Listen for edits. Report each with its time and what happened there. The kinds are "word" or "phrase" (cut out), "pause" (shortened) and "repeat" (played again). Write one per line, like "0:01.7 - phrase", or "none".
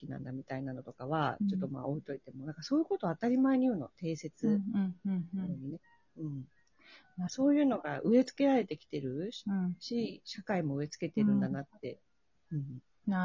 none